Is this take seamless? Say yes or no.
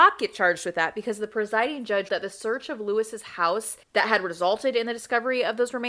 no